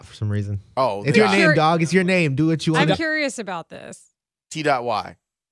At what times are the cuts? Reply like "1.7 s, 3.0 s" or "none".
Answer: 1.1 s, 2.9 s